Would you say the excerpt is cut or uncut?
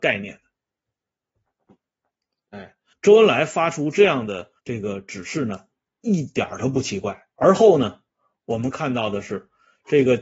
cut